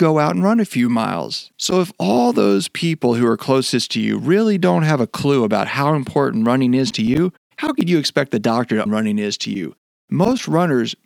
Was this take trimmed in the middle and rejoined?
yes; 2 cuts; at 1.5 s, 8.9 s

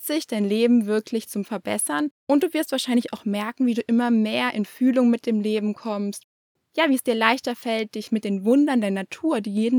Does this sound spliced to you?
yes; 1 cut; at 1.4 s

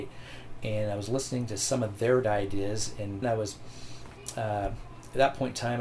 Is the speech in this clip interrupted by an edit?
yes; 2 cuts; at 2.2 s, 3.2 s

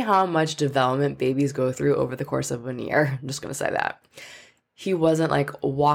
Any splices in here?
no; 0 cuts

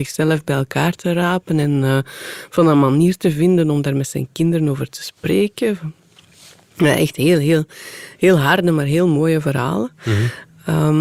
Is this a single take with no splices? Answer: yes; 0 cuts

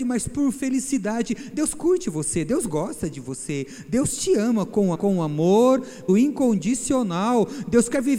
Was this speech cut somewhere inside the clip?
yes; 2 cuts; at 4.9 s, 6.1 s

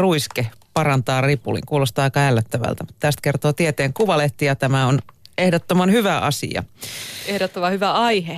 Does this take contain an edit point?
no; 0 cuts

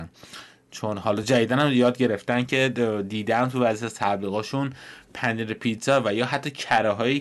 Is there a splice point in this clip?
no; 0 cuts

